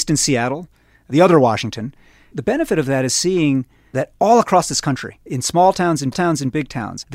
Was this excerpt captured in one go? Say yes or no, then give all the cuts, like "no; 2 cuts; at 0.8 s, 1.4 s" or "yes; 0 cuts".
no; 2 cuts; at 3.9 s, 6.1 s